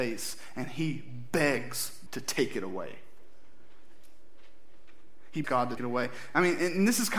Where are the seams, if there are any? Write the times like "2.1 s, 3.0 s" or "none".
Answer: 2.1 s, 5.4 s, 5.8 s